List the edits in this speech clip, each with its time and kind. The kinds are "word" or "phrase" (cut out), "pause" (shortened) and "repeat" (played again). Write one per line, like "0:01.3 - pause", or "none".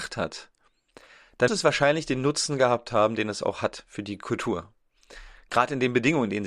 0:01.5 - word